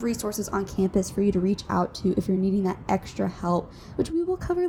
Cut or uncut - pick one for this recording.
uncut